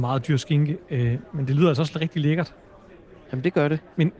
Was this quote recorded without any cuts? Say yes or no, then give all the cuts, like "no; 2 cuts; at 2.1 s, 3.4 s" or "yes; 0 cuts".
yes; 0 cuts